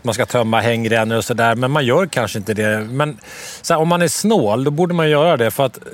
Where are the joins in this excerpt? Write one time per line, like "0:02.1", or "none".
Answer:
none